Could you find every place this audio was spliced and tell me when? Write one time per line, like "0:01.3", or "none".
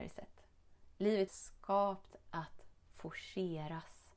0:01.3